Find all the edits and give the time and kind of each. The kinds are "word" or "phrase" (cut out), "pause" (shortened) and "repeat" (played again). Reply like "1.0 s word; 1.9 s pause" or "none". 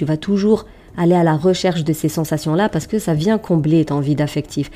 none